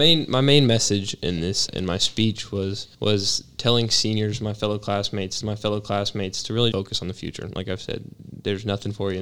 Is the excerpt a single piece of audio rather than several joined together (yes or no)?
no